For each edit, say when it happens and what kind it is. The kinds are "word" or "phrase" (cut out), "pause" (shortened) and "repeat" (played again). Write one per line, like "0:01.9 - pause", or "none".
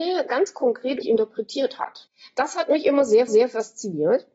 0:01.0 - word
0:03.3 - repeat